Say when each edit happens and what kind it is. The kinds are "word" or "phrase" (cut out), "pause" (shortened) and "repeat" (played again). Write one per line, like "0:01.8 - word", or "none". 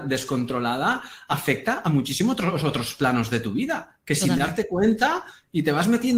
none